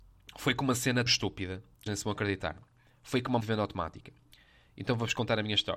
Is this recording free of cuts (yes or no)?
no